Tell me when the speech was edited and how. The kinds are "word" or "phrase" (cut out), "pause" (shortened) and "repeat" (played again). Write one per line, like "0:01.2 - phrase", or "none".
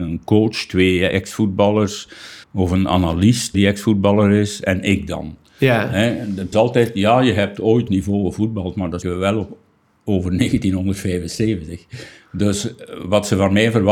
0:02.4 - pause
0:03.5 - word
0:06.5 - phrase
0:07.9 - phrase
0:09.0 - word
0:12.1 - pause

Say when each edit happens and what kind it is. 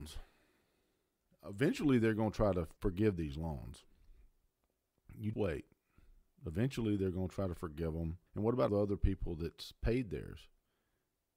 0:02.8 - pause
0:05.3 - word
0:08.3 - pause
0:08.7 - word

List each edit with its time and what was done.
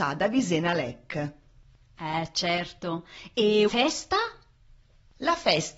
0:03.7 - word

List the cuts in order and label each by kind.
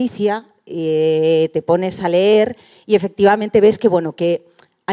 none

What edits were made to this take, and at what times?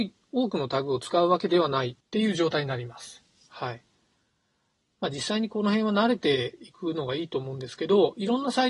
0:02.0 - pause

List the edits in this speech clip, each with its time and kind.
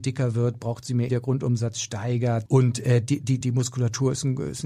0:01.1 - word
0:02.5 - word
0:03.4 - word

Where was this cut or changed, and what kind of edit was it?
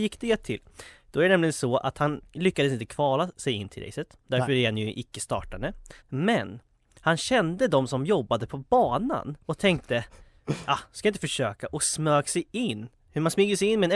0:06.0 - pause
0:09.4 - pause

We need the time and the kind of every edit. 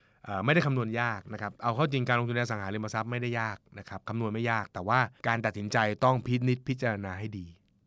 0:05.2 - pause

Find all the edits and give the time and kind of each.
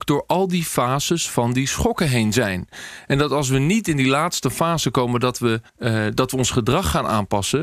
0:05.7 - pause

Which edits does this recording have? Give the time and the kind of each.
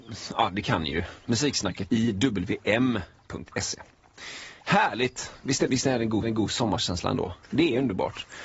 0:01.9 - word
0:05.7 - word
0:06.2 - repeat

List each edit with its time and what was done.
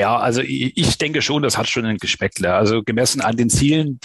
0:02.0 - word

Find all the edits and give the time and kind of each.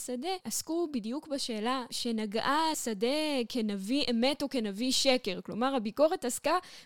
0:02.7 - phrase

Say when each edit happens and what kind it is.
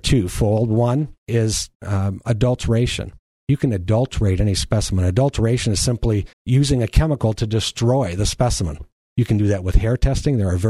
0:01.2 - pause
0:03.3 - pause
0:06.3 - pause
0:09.0 - pause

